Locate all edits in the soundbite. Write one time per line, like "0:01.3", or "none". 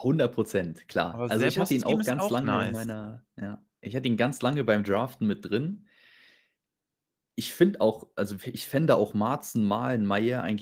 none